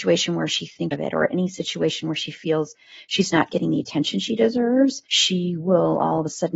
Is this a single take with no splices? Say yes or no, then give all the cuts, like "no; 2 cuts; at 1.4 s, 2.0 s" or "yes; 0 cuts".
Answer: no; 2 cuts; at 0.9 s, 5.0 s